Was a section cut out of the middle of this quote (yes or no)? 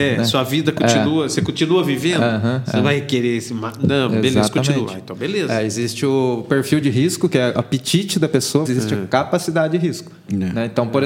yes